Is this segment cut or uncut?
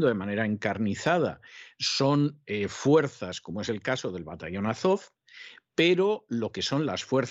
uncut